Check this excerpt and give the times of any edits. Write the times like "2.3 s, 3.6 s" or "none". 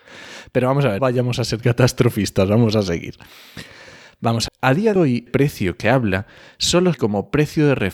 1.0 s, 1.6 s, 4.5 s, 5.0 s, 5.3 s, 5.8 s, 6.9 s